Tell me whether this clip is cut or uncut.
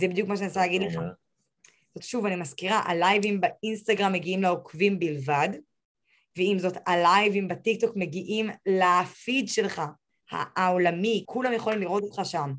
cut